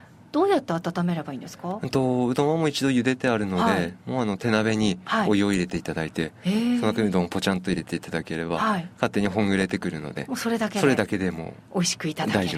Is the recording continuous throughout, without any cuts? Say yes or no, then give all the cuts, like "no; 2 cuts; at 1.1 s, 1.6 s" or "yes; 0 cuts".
yes; 0 cuts